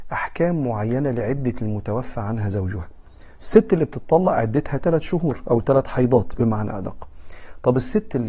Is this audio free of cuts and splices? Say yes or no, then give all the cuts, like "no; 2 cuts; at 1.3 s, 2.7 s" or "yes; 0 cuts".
yes; 0 cuts